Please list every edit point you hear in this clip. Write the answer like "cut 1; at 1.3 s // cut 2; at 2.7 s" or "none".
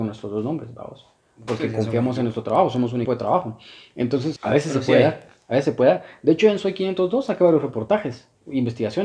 cut 1; at 3.0 s // cut 2; at 4.4 s